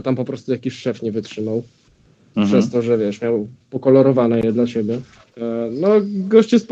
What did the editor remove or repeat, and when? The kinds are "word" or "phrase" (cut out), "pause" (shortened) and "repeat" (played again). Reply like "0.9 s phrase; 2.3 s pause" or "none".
none